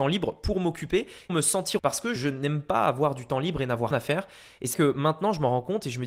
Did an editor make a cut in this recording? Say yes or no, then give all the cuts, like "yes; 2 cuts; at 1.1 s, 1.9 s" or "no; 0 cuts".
yes; 5 cuts; at 1.3 s, 1.8 s, 2.2 s, 3.9 s, 4.7 s